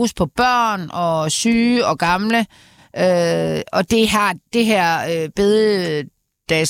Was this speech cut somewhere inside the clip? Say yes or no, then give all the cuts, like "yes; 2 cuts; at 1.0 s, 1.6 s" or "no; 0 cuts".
no; 0 cuts